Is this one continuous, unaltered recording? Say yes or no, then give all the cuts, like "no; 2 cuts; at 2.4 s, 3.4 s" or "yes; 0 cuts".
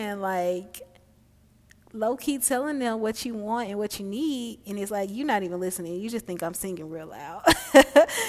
yes; 0 cuts